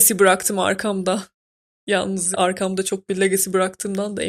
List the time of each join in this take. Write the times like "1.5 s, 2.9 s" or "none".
2.3 s, 3.1 s